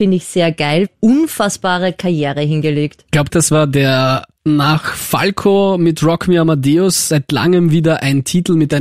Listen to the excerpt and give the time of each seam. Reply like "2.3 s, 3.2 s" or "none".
3.3 s